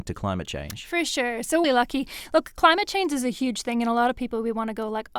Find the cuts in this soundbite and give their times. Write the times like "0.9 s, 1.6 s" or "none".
1.6 s